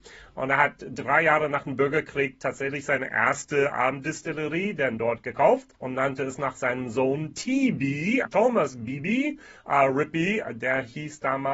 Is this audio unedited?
no; 2 cuts; at 5.7 s, 8.2 s

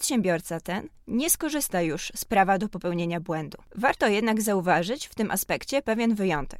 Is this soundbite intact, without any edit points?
no; 1 cut; at 3.6 s

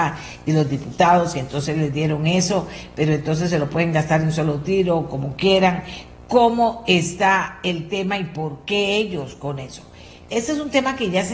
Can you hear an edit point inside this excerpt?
no; 0 cuts

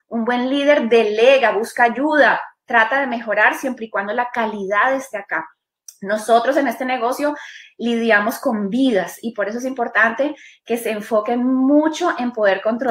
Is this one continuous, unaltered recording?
yes; 0 cuts

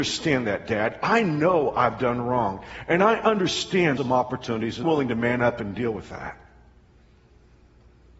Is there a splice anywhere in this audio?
yes; 2 cuts; at 4.0 s, 4.8 s

